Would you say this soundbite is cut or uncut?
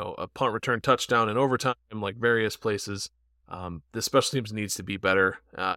uncut